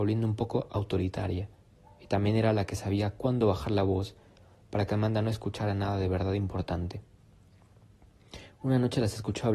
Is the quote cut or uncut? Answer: uncut